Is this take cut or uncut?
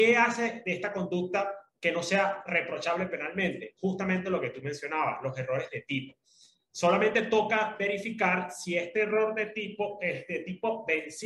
uncut